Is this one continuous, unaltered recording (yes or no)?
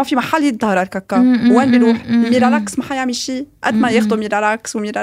yes